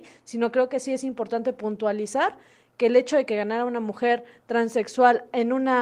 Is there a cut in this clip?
no; 0 cuts

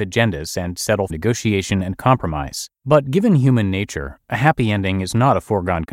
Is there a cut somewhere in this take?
yes; 2 cuts; at 1.1 s, 2.8 s

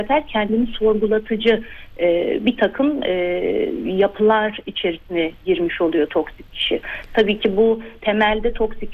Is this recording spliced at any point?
no; 0 cuts

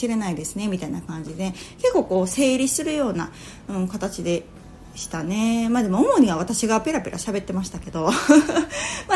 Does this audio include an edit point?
no; 0 cuts

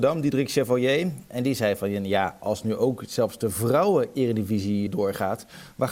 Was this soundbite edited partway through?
yes; 1 cut; at 4.9 s

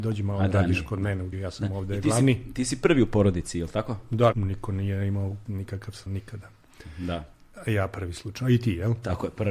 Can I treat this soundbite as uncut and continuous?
no; 4 cuts; at 1.3 s, 4.3 s, 5.5 s, 6.1 s

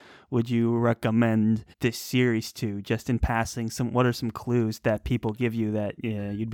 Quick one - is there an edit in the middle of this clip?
yes; 1 cut; at 1.7 s

